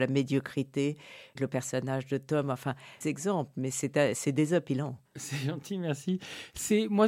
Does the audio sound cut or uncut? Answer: cut